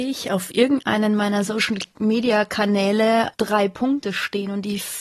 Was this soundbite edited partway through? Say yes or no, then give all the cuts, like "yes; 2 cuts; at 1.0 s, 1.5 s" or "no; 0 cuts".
no; 0 cuts